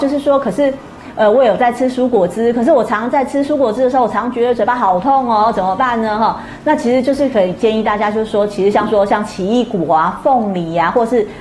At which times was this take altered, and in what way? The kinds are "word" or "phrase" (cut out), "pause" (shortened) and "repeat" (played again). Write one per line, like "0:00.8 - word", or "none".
none